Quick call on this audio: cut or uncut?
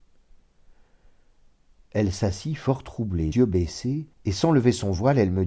cut